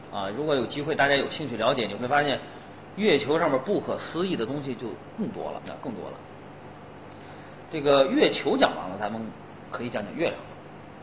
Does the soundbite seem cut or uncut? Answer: cut